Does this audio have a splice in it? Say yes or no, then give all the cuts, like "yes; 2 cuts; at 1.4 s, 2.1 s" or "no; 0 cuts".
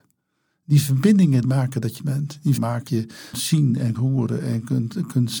yes; 6 cuts; at 1.4 s, 2.0 s, 2.6 s, 2.9 s, 3.3 s, 3.9 s